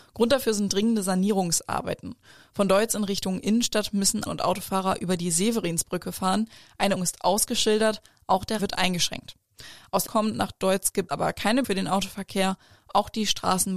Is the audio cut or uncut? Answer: cut